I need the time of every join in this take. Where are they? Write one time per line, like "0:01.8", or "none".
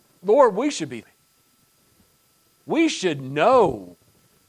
0:01.0